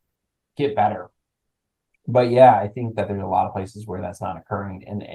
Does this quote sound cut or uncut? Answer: uncut